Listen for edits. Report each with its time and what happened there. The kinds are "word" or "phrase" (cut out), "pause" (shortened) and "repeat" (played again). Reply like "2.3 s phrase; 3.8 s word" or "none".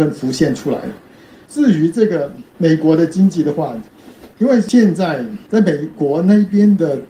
none